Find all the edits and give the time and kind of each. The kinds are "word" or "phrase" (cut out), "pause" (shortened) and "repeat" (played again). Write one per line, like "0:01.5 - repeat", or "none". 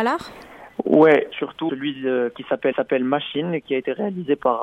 0:01.3 - phrase
0:01.7 - word
0:02.7 - repeat